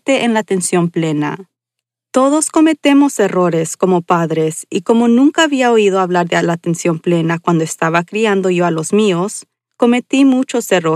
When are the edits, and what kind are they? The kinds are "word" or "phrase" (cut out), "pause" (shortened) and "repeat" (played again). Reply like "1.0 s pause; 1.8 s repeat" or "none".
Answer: none